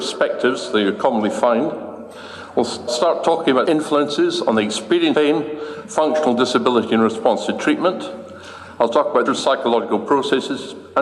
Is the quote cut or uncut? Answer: cut